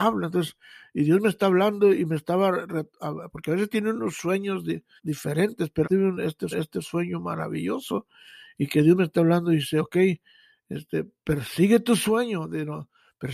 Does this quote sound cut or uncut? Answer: cut